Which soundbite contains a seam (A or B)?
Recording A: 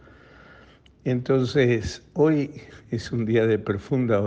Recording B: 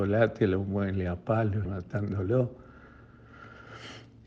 B